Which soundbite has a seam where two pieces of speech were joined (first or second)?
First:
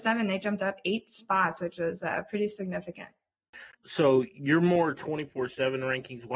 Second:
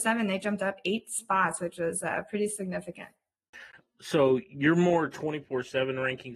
first